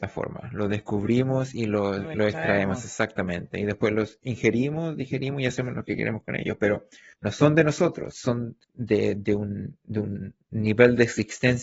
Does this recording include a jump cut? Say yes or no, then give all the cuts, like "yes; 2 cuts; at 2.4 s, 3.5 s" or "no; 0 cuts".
yes; 3 cuts; at 7.1 s, 8.1 s, 8.6 s